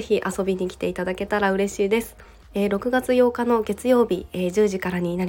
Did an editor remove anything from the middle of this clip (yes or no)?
no